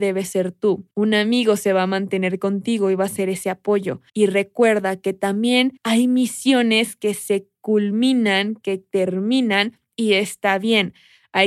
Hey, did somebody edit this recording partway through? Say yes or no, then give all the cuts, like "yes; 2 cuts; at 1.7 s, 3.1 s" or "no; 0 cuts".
yes; 3 cuts; at 0.9 s, 4.1 s, 5.8 s